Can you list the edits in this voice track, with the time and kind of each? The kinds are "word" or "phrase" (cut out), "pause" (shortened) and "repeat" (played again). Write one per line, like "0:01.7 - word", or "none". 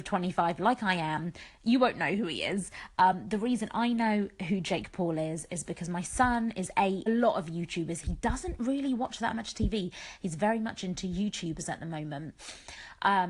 0:07.1 - phrase